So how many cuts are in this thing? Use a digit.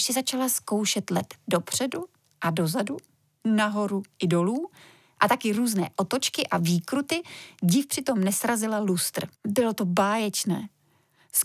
1